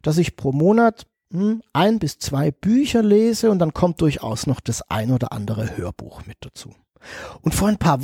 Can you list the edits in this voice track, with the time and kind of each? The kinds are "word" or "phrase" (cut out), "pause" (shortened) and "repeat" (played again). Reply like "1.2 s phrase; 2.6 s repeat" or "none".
none